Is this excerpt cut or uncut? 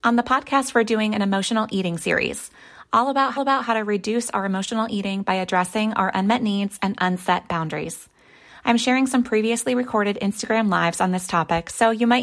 cut